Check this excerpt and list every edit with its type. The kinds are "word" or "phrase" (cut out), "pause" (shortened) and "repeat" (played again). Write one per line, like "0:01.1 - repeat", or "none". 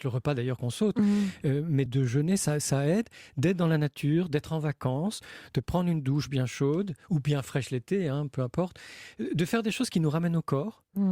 0:01.9 - word